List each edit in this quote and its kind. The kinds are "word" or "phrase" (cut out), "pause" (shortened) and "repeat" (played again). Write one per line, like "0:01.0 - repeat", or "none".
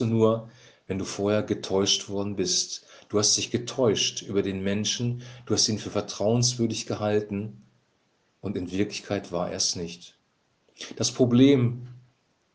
none